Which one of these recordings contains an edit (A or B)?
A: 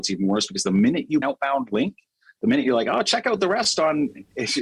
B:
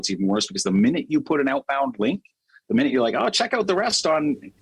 A